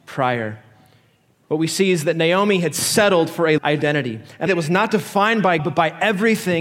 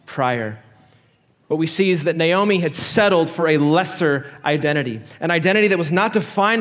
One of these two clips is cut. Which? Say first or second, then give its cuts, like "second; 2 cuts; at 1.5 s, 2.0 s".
first; 3 cuts; at 3.6 s, 4.5 s, 5.6 s